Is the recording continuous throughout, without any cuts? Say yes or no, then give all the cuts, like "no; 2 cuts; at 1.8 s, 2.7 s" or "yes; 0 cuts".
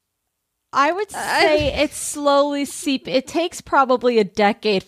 yes; 0 cuts